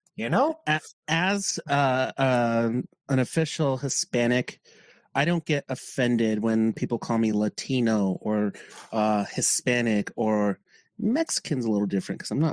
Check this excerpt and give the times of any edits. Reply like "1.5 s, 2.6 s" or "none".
none